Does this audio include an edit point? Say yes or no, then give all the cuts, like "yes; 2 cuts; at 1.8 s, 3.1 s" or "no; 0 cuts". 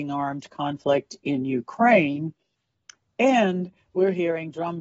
no; 0 cuts